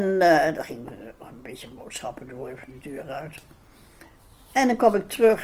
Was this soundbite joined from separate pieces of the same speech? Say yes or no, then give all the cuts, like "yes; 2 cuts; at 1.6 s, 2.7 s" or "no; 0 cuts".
no; 0 cuts